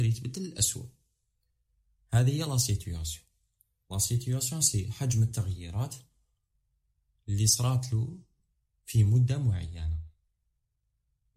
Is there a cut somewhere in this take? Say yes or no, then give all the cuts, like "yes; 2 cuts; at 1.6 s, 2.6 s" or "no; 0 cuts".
no; 0 cuts